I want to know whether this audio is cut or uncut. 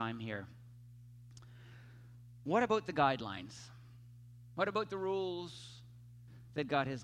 uncut